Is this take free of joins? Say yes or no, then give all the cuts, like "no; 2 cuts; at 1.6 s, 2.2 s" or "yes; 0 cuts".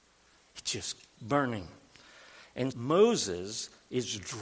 no; 2 cuts; at 1.2 s, 2.7 s